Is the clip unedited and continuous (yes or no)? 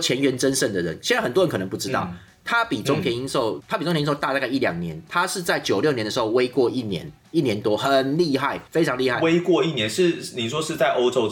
no